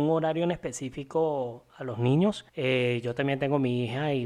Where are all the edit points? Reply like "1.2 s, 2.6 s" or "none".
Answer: 2.5 s